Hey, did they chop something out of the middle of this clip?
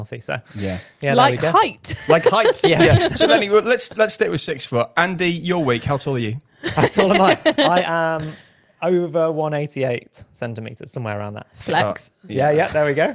no; 0 cuts

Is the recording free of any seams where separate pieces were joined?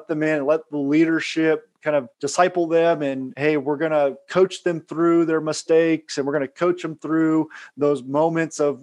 no; 1 cut; at 2.1 s

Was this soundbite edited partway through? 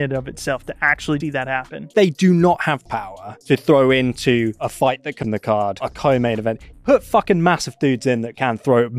yes; 6 cuts; at 1.2 s, 1.9 s, 2.9 s, 5.2 s, 5.8 s, 6.7 s

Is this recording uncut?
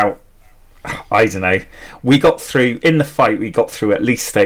yes; 0 cuts

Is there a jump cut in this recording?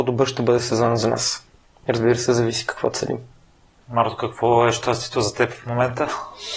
no; 0 cuts

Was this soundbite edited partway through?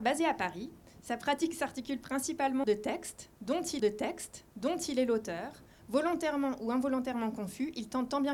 yes; 2 cuts; at 2.6 s, 3.8 s

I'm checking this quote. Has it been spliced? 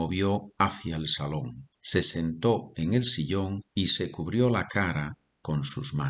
yes; 2 cuts; at 1.7 s, 3.7 s

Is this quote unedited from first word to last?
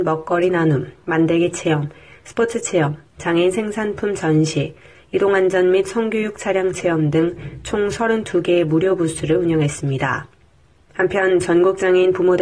yes; 0 cuts

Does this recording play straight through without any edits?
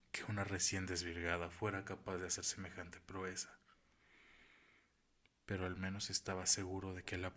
yes; 0 cuts

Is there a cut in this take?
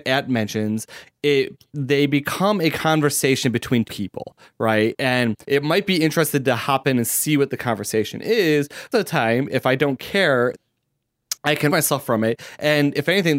yes; 6 cuts; at 1.7 s, 3.8 s, 5.4 s, 8.9 s, 10.5 s, 11.7 s

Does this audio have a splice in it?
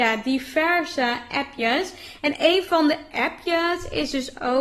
no; 0 cuts

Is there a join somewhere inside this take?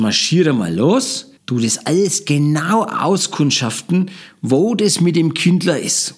yes; 1 cut; at 1.4 s

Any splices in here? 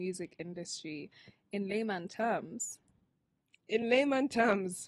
no; 0 cuts

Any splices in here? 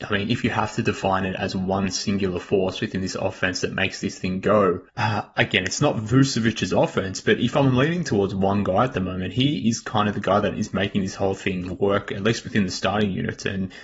yes; 1 cut; at 4.9 s

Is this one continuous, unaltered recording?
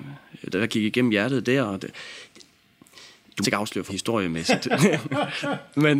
no; 2 cuts; at 3.4 s, 3.9 s

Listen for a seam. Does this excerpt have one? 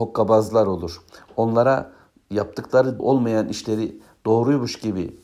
yes; 1 cut; at 3.0 s

